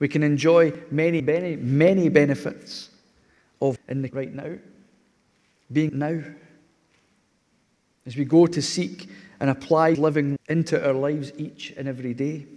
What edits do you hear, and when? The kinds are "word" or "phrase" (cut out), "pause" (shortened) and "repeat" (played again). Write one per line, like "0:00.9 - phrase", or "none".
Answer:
0:01.2 - word
0:03.8 - word
0:04.1 - word
0:05.9 - word
0:09.9 - word
0:10.4 - word